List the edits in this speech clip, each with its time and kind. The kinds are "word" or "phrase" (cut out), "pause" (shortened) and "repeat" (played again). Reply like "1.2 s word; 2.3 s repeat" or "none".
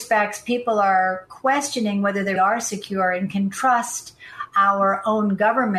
2.4 s word

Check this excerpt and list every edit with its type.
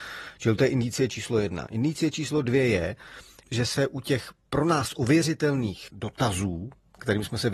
none

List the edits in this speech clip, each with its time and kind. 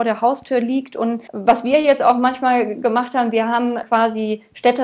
none

